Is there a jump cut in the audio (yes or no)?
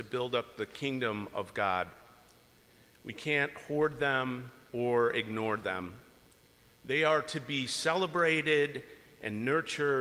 no